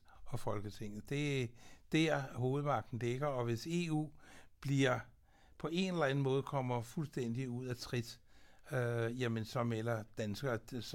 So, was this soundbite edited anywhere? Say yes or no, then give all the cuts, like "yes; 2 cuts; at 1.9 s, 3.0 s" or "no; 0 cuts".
no; 0 cuts